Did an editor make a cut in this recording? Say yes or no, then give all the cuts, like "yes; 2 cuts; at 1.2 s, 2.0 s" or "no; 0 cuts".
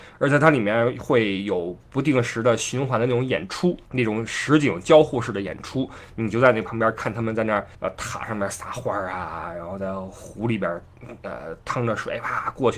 yes; 2 cuts; at 3.8 s, 7.7 s